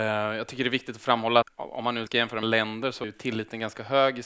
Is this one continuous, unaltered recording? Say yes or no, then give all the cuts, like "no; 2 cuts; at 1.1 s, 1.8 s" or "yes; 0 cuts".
no; 4 cuts; at 1.4 s, 2.1 s, 2.4 s, 3.0 s